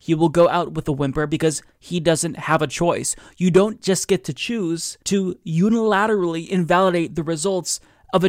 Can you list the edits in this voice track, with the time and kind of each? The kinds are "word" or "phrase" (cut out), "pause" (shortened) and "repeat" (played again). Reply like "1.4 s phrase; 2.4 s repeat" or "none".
5.0 s pause